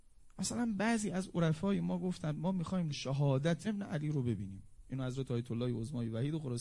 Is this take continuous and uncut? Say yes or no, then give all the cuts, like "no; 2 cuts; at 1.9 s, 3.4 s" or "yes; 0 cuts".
no; 2 cuts; at 2.9 s, 3.6 s